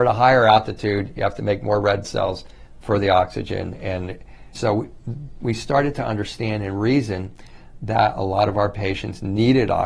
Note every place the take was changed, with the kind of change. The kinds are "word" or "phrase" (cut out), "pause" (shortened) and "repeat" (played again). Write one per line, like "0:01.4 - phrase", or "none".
0:02.0 - word
0:04.5 - word